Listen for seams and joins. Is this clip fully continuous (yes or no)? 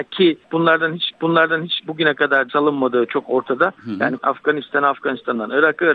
no